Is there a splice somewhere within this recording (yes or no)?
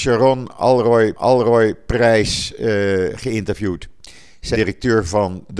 yes